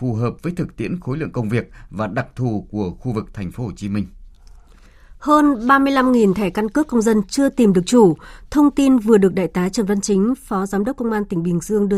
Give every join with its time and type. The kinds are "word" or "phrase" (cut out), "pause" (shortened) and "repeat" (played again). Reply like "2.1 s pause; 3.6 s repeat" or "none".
none